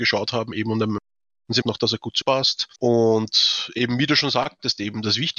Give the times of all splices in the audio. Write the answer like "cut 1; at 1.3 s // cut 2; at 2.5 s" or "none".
cut 1; at 1.6 s // cut 2; at 2.2 s // cut 3; at 2.8 s